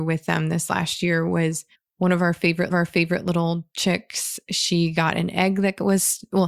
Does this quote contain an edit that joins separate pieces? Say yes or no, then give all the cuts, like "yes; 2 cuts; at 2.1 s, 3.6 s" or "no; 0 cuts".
yes; 2 cuts; at 1.7 s, 2.7 s